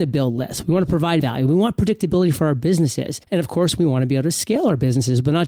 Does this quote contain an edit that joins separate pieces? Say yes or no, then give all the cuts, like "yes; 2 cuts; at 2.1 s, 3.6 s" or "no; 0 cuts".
yes; 2 cuts; at 1.2 s, 3.2 s